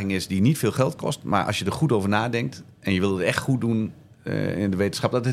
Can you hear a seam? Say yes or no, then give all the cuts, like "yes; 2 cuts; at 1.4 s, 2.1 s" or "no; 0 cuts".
no; 0 cuts